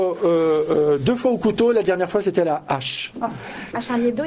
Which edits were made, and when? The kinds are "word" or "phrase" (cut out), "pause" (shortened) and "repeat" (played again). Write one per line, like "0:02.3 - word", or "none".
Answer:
none